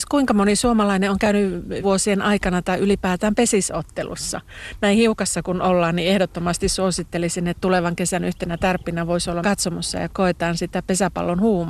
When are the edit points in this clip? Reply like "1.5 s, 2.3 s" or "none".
1.8 s, 9.4 s, 10.1 s